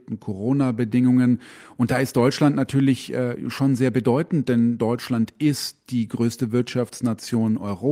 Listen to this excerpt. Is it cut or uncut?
uncut